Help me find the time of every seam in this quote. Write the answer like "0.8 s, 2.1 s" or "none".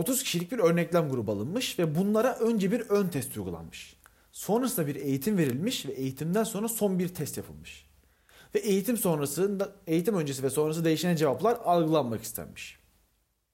none